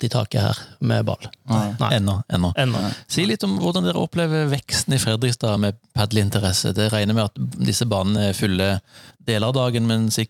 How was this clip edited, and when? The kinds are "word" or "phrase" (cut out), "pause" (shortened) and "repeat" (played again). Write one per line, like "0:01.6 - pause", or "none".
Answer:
none

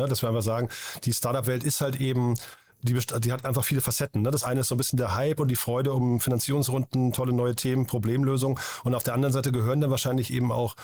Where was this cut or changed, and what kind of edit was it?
none

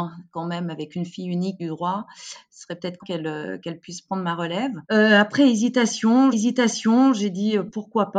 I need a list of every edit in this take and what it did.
0:01.6 - phrase
0:03.0 - phrase
0:04.8 - pause
0:06.3 - repeat

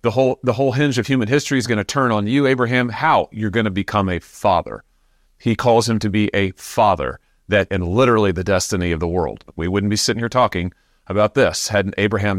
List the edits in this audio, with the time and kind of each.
0:07.7 - phrase
0:09.5 - pause

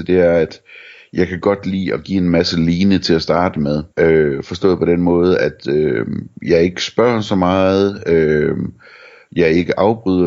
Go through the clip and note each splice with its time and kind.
0:03.9 - pause

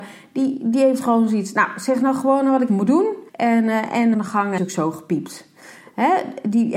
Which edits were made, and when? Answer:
0:02.7 - word
0:03.3 - pause
0:04.1 - phrase
0:04.6 - phrase

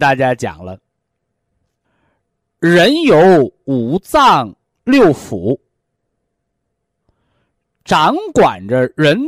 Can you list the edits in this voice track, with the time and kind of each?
none

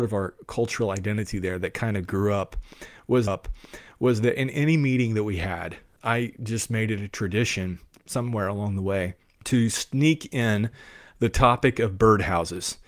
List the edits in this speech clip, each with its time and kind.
0:03.3 - repeat

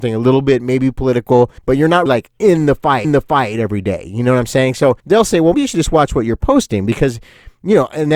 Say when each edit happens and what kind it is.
0:01.6 - pause
0:02.1 - word
0:03.0 - repeat
0:05.0 - pause
0:05.5 - word

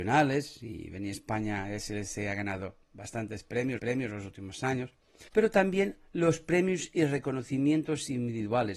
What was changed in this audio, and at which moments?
0:03.8 - repeat
0:05.3 - pause

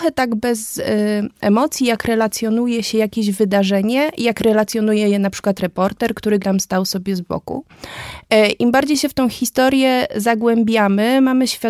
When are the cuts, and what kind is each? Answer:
0:06.4 - word

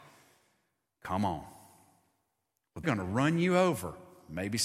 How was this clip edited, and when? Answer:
0:02.8 - word

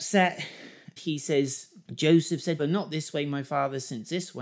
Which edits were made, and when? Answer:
0:01.0 - word
0:01.8 - pause
0:02.6 - phrase

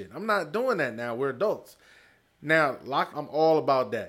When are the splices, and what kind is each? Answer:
0:03.1 - word

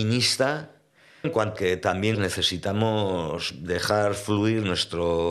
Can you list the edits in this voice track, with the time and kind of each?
0:01.2 - word
0:01.6 - word
0:02.1 - word

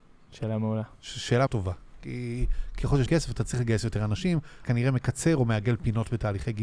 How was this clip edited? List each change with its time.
0:01.5 - word
0:03.1 - word
0:04.6 - word

